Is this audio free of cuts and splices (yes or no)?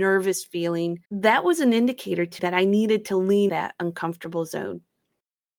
no